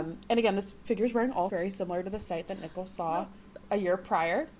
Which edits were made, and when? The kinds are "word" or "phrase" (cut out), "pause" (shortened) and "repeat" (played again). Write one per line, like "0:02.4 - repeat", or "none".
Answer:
0:01.5 - word